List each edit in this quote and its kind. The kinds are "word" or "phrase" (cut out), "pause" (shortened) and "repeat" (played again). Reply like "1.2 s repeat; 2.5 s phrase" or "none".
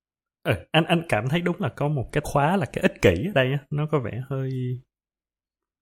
2.2 s word